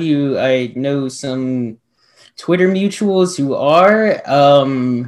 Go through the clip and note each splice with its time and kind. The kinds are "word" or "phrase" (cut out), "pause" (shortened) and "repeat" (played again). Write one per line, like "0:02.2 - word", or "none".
none